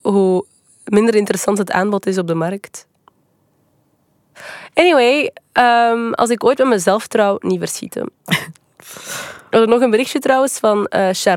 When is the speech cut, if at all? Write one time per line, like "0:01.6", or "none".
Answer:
none